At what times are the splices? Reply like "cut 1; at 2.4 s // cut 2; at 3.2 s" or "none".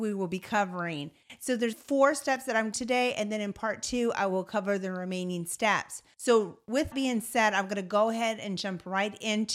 cut 1; at 1.7 s // cut 2; at 2.7 s // cut 3; at 6.9 s